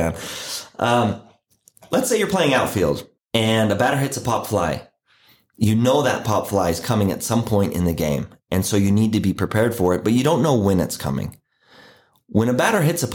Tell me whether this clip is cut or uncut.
uncut